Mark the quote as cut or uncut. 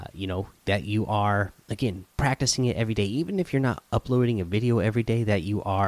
uncut